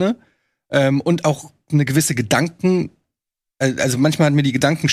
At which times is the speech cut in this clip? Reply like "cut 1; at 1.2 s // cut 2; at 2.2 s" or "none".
none